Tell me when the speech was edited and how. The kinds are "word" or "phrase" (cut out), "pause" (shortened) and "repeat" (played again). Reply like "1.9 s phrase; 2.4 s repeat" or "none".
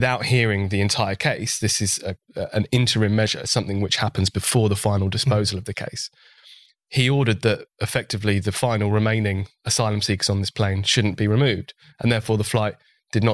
none